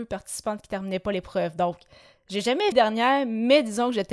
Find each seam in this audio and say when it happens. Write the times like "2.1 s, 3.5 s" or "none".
2.7 s